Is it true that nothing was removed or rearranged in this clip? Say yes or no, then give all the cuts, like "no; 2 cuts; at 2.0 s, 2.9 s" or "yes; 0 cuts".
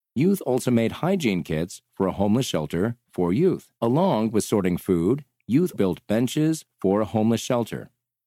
no; 2 cuts; at 3.8 s, 5.7 s